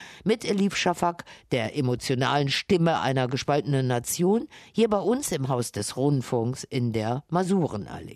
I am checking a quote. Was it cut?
no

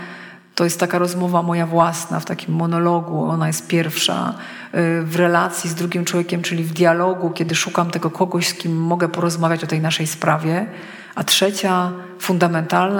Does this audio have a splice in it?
no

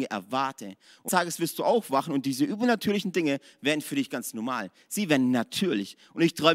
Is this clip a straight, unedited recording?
no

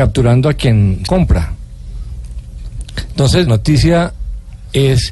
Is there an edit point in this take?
yes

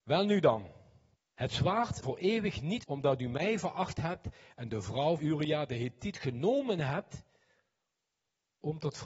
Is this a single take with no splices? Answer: no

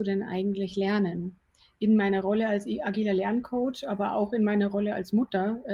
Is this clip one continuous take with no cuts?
yes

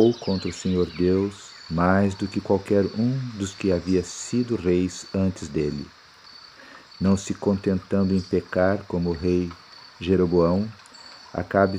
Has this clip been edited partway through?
no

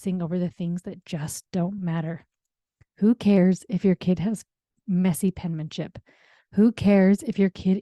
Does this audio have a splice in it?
no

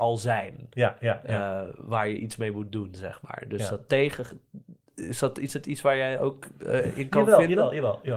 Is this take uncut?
yes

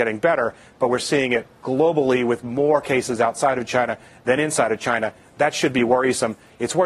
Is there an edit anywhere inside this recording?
no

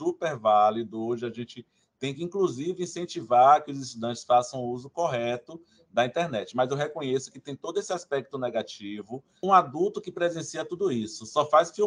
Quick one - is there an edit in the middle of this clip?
no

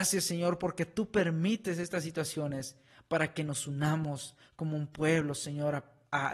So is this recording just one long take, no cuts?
yes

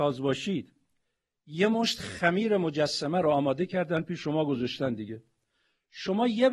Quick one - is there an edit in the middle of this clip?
no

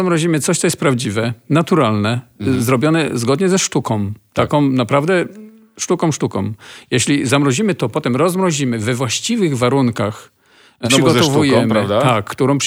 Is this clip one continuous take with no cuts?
no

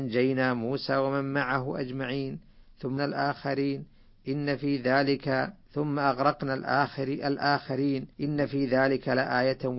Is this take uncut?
no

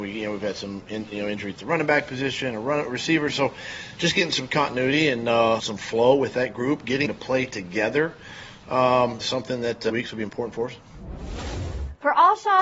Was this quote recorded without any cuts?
no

